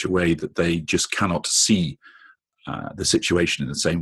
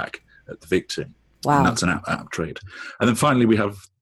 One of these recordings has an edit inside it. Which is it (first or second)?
second